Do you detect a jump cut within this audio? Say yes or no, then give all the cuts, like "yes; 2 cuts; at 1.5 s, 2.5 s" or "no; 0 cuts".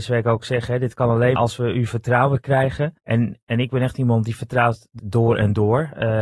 yes; 3 cuts; at 1.4 s, 3.0 s, 5.0 s